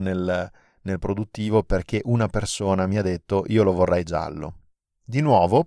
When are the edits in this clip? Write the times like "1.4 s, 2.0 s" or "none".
1.0 s